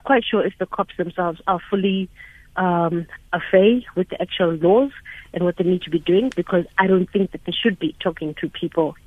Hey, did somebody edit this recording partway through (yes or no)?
no